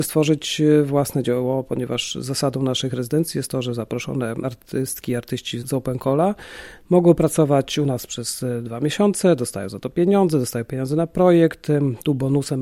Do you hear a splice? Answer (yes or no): no